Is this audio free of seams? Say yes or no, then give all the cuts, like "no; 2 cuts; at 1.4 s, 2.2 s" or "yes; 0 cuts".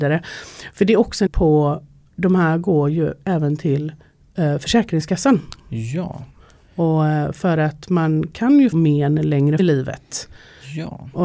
no; 3 cuts; at 1.3 s, 8.7 s, 9.6 s